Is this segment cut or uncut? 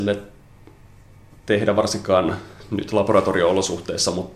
uncut